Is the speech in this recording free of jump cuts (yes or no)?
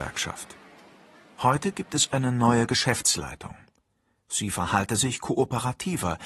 yes